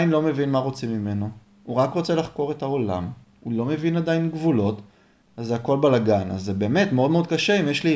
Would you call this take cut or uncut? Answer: uncut